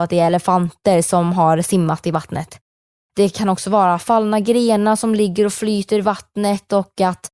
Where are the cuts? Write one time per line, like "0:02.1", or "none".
none